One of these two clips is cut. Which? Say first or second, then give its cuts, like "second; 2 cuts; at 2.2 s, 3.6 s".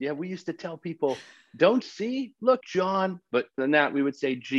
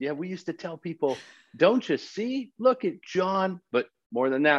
first; 3 cuts; at 1.8 s, 2.6 s, 3.6 s